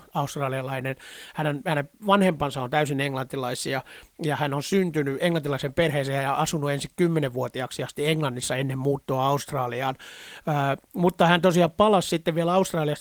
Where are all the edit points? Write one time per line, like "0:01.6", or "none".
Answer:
none